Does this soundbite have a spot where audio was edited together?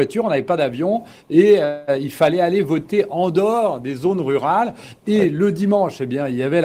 no; 0 cuts

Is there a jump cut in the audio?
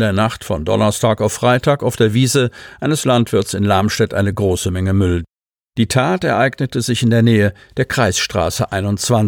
no; 0 cuts

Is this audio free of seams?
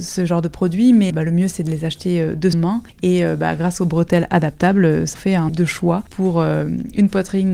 no; 4 cuts; at 1.1 s, 2.5 s, 5.1 s, 5.5 s

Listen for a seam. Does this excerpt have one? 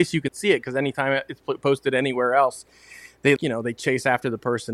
yes; 1 cut; at 3.4 s

